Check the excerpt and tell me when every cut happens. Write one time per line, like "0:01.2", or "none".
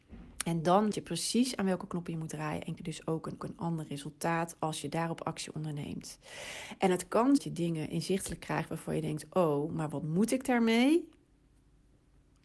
0:00.9
0:02.8
0:03.4
0:07.4